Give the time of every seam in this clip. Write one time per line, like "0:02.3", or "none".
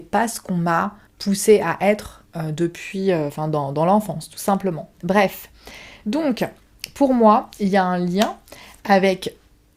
0:01.1
0:02.3
0:04.9

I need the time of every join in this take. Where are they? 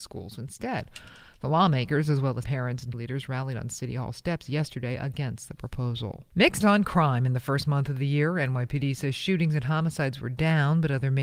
0:02.4
0:02.9
0:06.6

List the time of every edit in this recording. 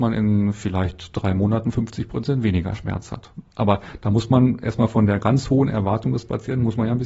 none

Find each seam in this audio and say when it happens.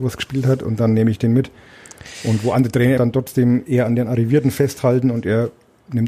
0:03.0

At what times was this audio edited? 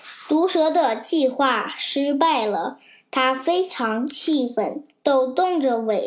none

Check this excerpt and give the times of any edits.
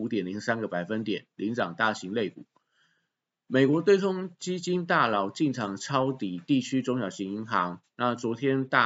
none

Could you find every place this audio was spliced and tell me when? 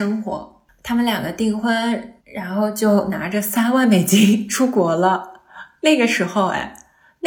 0:02.2

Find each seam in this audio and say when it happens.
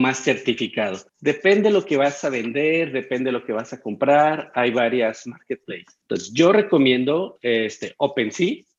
0:01.1
0:06.0

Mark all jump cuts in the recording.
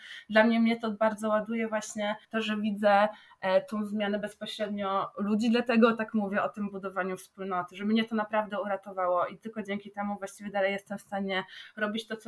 0:02.2

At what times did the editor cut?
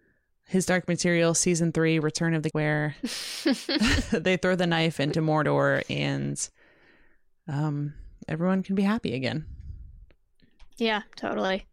0:02.5

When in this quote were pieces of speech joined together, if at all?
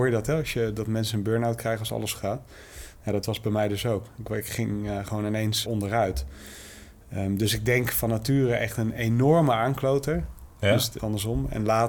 0:02.1
0:05.6
0:11.0

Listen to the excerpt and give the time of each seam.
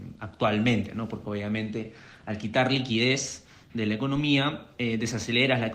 none

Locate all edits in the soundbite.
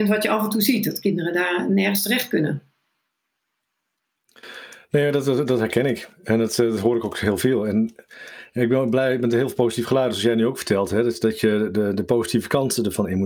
none

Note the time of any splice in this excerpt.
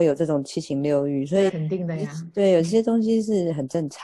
0:01.5

